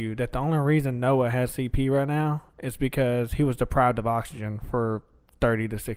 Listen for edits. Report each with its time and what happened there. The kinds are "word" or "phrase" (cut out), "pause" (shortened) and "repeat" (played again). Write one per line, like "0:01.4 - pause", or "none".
none